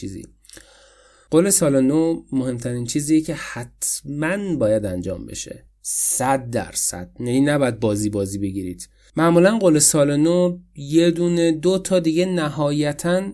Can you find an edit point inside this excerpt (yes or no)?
no